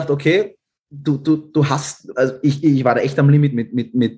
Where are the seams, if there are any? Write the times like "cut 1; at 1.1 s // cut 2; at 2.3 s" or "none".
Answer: none